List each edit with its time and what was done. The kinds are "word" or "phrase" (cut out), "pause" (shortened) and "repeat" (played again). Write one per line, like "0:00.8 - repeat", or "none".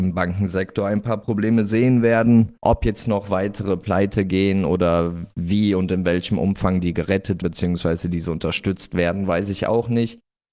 0:02.6 - pause
0:07.4 - word